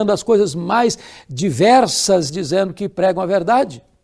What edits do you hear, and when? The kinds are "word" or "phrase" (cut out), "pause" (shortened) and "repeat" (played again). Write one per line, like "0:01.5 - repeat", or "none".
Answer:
0:02.3 - phrase